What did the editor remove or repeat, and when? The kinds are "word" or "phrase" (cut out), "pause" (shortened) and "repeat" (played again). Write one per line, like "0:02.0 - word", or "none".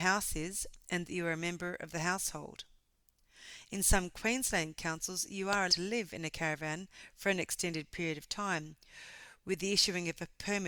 0:05.7 - word